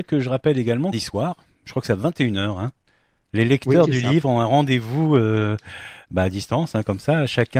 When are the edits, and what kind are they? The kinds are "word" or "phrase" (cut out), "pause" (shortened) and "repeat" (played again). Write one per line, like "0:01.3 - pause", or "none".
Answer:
0:00.9 - phrase